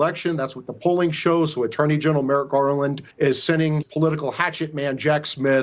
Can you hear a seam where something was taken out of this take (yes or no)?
yes